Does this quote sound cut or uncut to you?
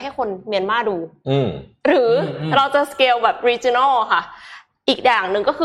uncut